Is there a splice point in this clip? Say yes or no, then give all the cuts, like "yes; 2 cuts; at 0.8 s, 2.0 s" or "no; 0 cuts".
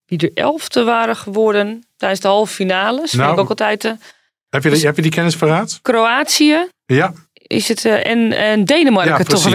no; 0 cuts